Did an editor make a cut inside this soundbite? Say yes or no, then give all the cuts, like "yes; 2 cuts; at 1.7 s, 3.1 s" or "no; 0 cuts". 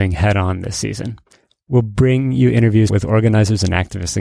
no; 0 cuts